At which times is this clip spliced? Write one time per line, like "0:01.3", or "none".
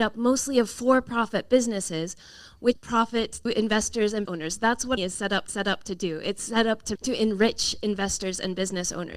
0:02.7
0:03.5
0:04.3
0:05.0
0:05.5
0:07.0